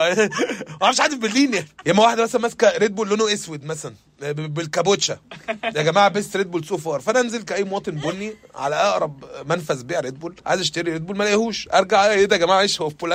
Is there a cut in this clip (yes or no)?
yes